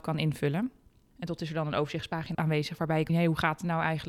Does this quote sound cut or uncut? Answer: cut